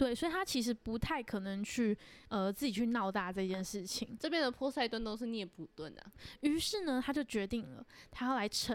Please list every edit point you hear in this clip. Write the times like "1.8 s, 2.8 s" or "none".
2.3 s